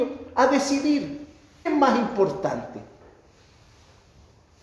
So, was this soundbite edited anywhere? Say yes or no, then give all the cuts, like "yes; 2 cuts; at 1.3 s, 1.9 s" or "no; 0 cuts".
yes; 1 cut; at 1.7 s